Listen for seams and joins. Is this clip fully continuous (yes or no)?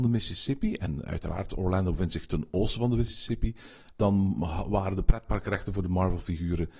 yes